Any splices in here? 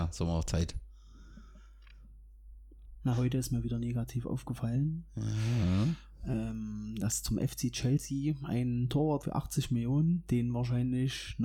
yes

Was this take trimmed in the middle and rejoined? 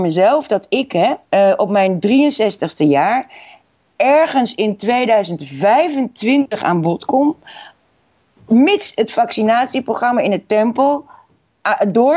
yes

